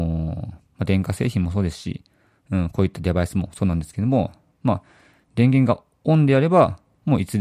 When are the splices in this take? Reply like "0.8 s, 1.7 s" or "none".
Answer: none